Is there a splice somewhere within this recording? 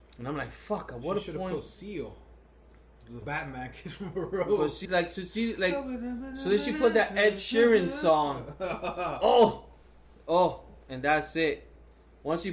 yes; 2 cuts; at 3.2 s, 4.8 s

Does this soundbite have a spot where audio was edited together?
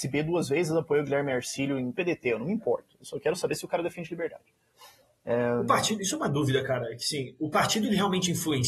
yes; 1 cut; at 1.9 s

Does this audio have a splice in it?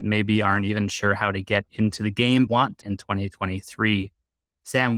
yes; 2 cuts; at 2.5 s, 2.8 s

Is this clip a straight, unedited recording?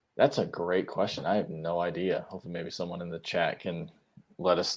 yes; 0 cuts

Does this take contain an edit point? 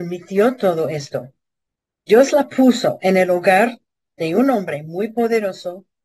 no; 0 cuts

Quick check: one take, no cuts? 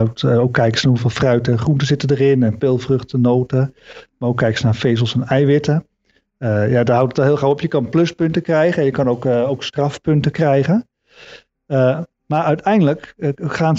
yes; 0 cuts

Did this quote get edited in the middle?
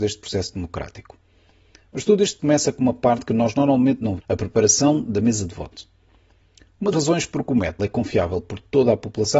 yes; 4 cuts; at 2.4 s, 4.2 s, 6.9 s, 7.8 s

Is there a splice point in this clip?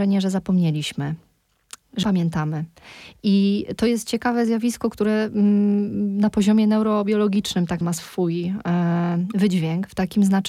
yes; 2 cuts; at 2.0 s, 7.8 s

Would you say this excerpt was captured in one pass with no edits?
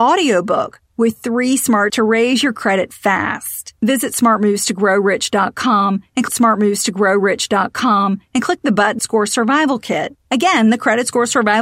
no; 5 cuts; at 1.9 s, 3.7 s, 6.3 s, 9.0 s, 10.2 s

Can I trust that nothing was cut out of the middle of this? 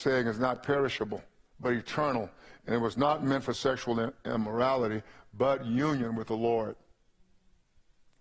yes; 0 cuts

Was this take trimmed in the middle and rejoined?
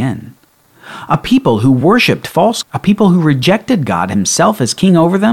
yes; 1 cut; at 2.6 s

